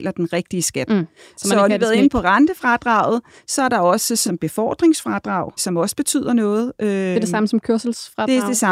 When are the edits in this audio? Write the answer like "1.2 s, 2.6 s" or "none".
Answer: 1.7 s, 4.2 s, 5.6 s